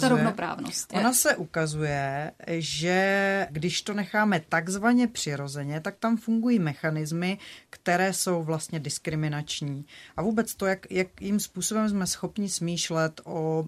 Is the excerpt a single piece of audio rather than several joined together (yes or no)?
yes